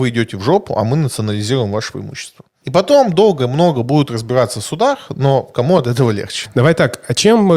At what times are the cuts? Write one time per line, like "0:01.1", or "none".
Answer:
none